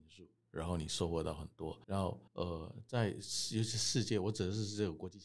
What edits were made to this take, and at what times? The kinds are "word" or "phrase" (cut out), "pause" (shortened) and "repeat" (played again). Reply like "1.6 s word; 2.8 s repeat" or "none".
1.8 s pause; 2.3 s pause